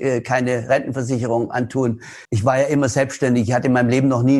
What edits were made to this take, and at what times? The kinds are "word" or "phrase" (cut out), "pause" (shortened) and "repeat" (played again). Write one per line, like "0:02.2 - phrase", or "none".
0:02.2 - pause